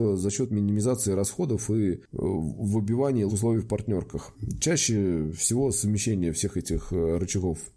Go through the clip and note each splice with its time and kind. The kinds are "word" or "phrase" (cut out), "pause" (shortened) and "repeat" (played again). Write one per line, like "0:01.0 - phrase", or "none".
0:03.3 - word